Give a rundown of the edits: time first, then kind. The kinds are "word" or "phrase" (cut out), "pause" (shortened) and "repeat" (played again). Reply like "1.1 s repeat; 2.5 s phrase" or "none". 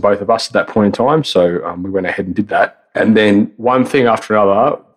none